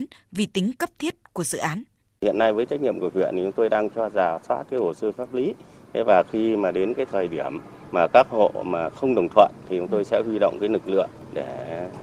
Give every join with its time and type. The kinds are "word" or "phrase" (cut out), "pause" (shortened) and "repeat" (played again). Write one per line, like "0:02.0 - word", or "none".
none